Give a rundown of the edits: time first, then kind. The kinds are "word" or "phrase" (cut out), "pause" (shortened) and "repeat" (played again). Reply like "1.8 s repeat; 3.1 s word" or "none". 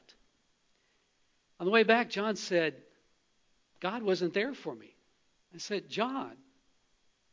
5.4 s pause